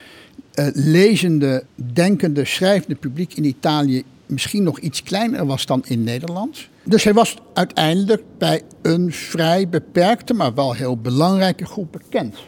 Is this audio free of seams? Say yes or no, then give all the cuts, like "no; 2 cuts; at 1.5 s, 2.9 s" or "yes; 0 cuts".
no; 1 cut; at 1.7 s